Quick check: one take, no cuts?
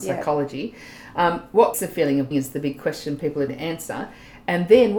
no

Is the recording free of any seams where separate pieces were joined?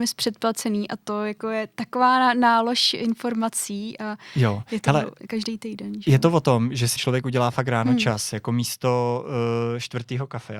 no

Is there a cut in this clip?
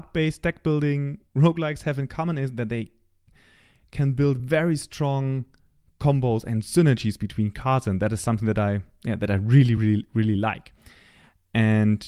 no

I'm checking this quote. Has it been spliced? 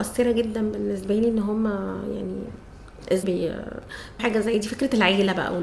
yes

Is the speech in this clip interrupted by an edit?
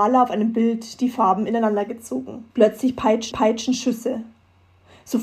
yes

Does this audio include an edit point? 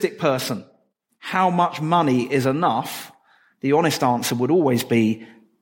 no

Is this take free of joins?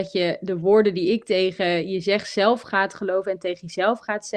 yes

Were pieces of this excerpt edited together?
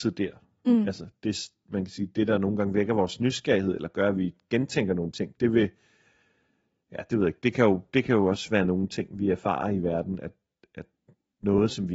no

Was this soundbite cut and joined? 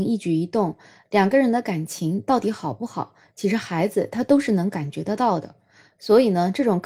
no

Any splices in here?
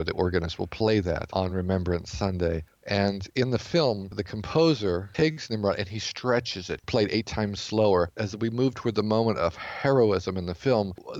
no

